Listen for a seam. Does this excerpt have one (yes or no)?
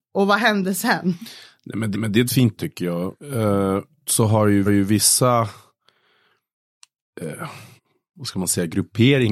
yes